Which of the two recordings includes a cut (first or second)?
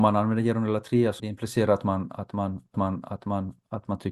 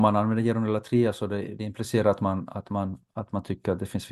first